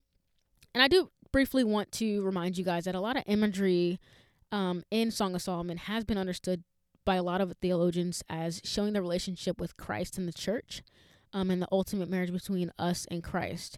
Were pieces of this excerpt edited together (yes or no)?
no